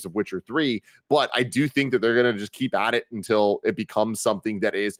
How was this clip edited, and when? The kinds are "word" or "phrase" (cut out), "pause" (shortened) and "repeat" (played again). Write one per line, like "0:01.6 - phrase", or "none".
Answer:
none

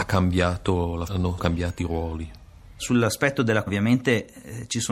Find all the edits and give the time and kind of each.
0:01.1 - word
0:01.4 - word
0:01.8 - word
0:03.7 - word

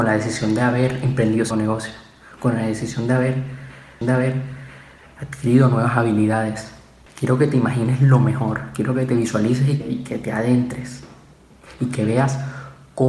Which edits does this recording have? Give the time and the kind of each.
0:01.5 - word
0:04.0 - repeat
0:09.8 - word

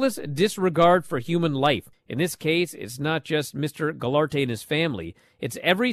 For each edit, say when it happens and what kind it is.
0:01.9 - pause

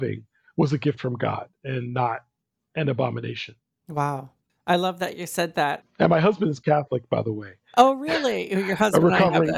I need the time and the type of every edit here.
none

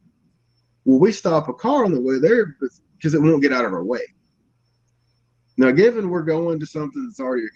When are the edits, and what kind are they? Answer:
none

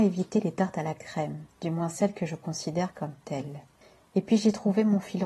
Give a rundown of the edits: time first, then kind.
0:01.5 - pause
0:03.8 - pause

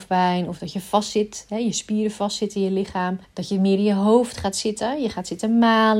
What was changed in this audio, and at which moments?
0:03.2 - pause

